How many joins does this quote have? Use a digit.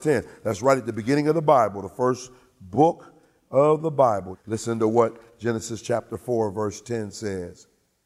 0